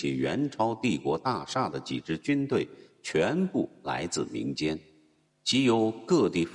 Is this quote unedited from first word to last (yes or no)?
yes